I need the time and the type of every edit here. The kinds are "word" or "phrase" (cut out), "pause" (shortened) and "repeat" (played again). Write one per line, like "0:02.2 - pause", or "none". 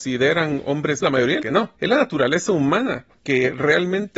0:01.0 - word
0:01.4 - phrase
0:01.7 - pause
0:03.2 - pause